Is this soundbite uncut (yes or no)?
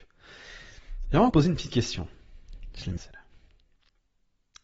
no